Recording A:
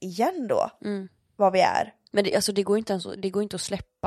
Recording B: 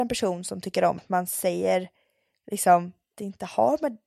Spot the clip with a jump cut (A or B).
B